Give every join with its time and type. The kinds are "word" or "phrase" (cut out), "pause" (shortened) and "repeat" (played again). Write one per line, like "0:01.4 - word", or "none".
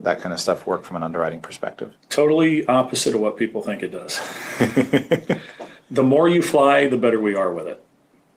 0:02.0 - pause